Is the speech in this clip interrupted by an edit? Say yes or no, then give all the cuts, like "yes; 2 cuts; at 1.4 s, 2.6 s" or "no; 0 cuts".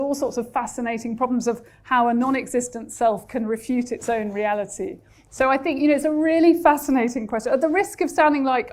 no; 0 cuts